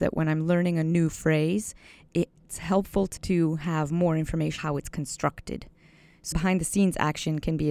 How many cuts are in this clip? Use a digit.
3